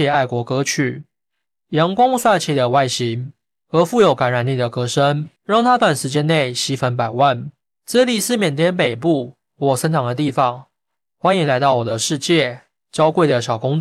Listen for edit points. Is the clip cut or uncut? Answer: cut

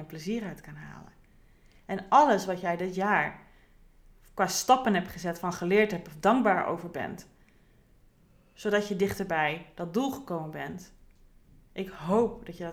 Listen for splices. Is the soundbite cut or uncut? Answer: uncut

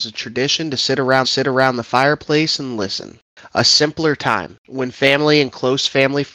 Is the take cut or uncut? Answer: cut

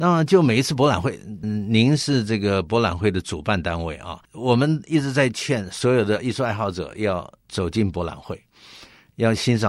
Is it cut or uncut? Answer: cut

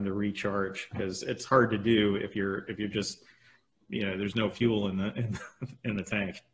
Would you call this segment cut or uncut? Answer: uncut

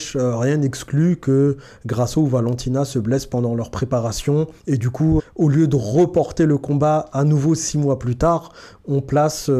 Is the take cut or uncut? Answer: cut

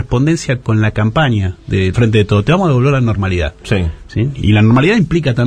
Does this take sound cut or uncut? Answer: cut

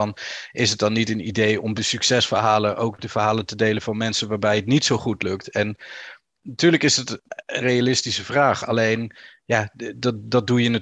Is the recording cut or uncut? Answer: cut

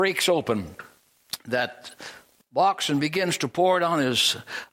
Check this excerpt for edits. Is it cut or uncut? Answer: uncut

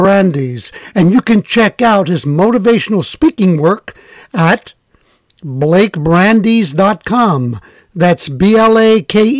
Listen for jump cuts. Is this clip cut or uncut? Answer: uncut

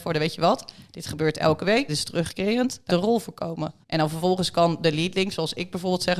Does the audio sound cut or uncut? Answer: cut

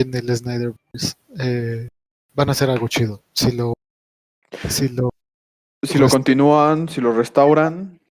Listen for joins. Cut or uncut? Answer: uncut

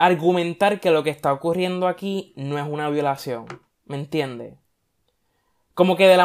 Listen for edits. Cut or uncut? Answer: uncut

